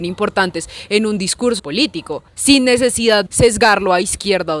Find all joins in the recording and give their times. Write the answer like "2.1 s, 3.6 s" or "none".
1.6 s, 2.3 s, 3.3 s